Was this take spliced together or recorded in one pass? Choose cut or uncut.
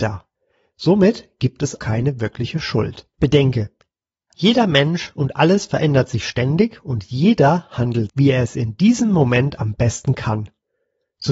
cut